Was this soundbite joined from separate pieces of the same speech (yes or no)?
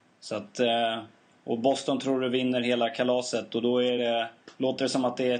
no